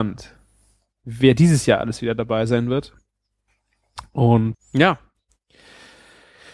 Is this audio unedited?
no; 1 cut; at 4.5 s

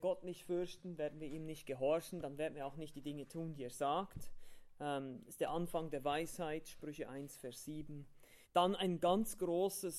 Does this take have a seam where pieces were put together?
yes; 1 cut; at 8.4 s

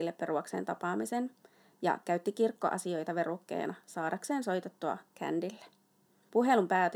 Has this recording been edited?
no; 0 cuts

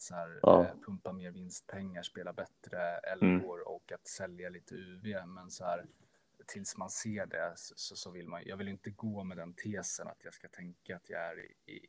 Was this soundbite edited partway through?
no; 0 cuts

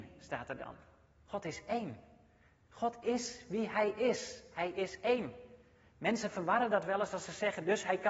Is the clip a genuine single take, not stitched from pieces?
yes; 0 cuts

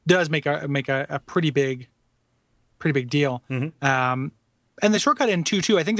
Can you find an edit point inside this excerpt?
no; 0 cuts

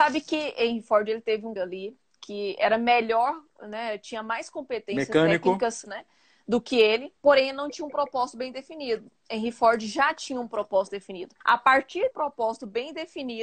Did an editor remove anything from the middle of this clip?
yes; 5 cuts; at 1.6 s, 5.9 s, 7.2 s, 11.4 s, 12.1 s

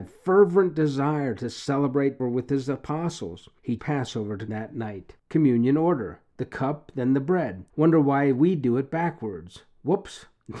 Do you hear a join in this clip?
yes; 4 cuts; at 2.2 s, 3.8 s, 4.5 s, 5.2 s

